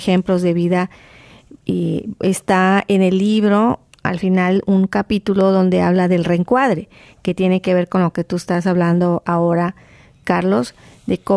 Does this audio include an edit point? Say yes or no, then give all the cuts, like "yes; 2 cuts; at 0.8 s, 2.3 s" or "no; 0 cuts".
no; 0 cuts